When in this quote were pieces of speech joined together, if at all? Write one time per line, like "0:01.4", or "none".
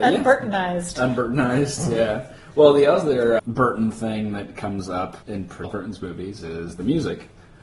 0:03.4
0:05.2
0:05.6